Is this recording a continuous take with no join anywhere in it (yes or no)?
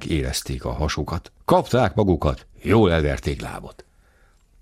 no